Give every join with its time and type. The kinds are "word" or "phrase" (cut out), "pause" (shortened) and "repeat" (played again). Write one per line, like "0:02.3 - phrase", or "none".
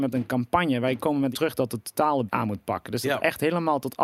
0:01.3 - word
0:02.3 - word